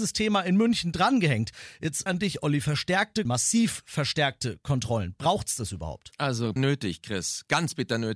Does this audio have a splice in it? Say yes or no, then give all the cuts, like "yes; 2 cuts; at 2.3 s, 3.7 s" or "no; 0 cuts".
yes; 3 cuts; at 2.1 s, 3.3 s, 6.6 s